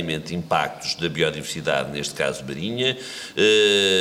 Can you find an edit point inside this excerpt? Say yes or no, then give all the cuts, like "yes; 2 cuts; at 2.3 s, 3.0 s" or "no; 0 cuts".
no; 0 cuts